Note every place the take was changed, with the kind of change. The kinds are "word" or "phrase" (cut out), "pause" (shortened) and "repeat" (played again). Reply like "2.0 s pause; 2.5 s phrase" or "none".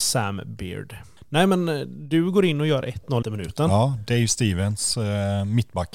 3.2 s phrase